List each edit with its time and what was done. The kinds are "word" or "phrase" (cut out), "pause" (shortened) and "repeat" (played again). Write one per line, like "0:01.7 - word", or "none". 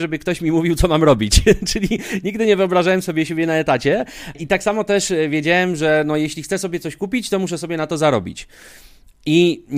none